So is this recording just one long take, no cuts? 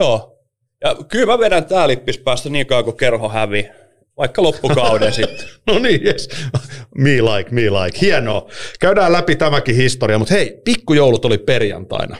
yes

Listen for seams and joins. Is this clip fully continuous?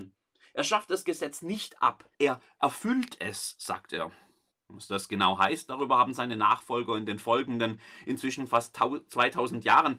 no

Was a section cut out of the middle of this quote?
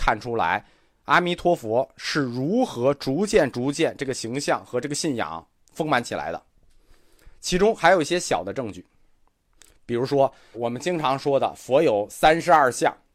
yes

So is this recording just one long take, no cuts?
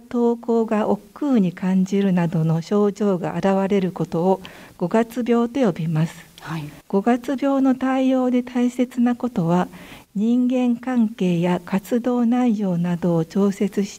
no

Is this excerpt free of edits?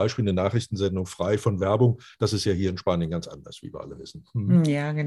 yes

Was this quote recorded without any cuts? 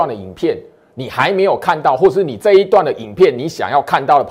yes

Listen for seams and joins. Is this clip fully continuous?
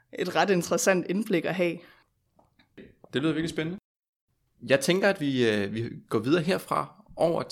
yes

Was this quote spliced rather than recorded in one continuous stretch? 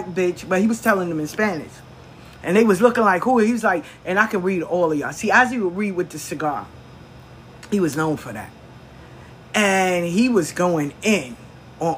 no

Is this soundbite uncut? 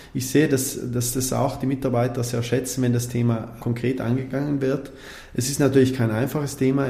yes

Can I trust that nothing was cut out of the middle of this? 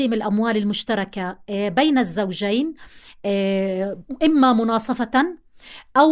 yes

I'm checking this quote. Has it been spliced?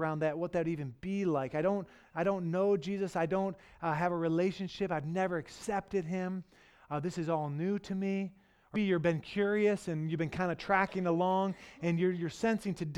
yes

